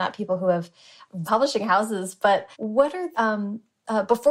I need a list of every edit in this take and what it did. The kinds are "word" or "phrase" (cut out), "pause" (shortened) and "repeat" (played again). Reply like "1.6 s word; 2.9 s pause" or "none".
1.3 s phrase; 2.5 s pause; 3.1 s word